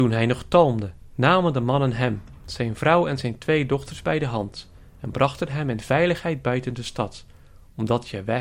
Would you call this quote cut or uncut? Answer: uncut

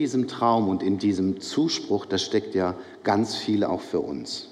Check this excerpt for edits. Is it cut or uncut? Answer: uncut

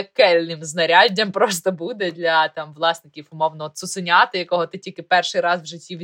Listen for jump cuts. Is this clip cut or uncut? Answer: uncut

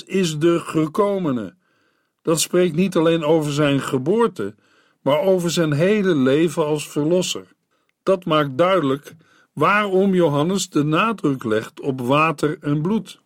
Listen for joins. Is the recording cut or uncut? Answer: uncut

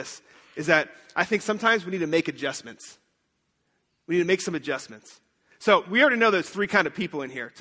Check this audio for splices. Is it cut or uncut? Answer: uncut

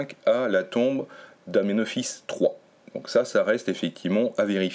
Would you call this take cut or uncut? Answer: uncut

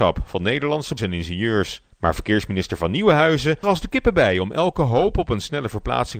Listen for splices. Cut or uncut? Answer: cut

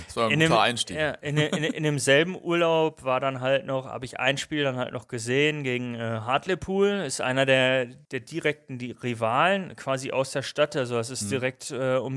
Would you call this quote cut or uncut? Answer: uncut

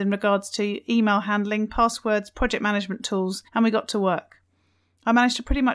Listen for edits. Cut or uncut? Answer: cut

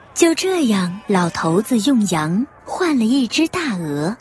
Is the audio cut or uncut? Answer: cut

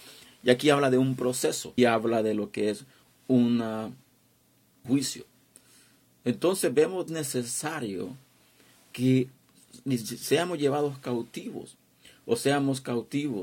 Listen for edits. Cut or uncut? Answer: cut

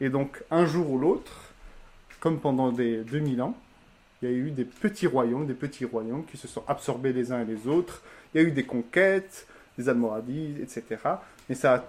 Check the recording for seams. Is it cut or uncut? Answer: uncut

